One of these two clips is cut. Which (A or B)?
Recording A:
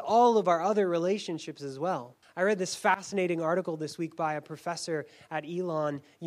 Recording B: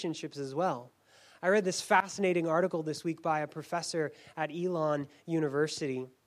A